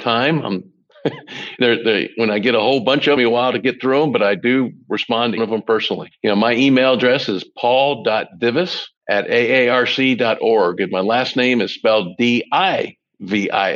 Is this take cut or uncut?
cut